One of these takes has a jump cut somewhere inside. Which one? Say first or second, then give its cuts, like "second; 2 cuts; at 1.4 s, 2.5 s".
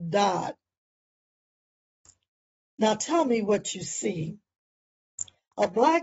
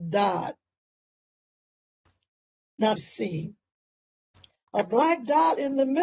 second; 1 cut; at 3.0 s